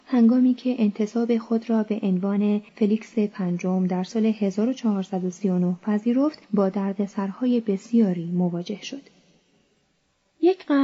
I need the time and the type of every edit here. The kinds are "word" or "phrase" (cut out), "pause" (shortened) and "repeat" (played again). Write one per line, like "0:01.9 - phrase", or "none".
0:02.7 - pause
0:06.4 - pause